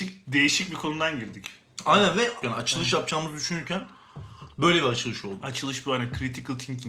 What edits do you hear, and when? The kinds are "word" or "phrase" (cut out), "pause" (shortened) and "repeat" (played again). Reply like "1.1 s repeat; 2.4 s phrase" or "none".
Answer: 2.4 s phrase; 4.5 s pause